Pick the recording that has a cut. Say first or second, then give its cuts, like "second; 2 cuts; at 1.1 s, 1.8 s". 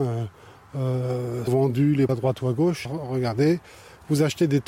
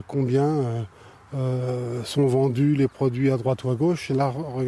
first; 3 cuts; at 1.5 s, 2.1 s, 2.8 s